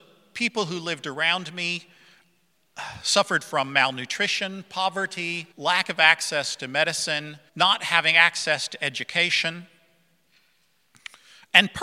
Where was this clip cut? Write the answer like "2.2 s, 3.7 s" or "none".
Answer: 5.5 s, 7.5 s